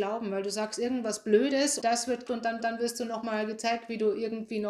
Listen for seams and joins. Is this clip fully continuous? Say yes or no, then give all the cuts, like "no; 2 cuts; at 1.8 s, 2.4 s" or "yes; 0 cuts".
no; 3 cuts; at 1.8 s, 2.3 s, 2.6 s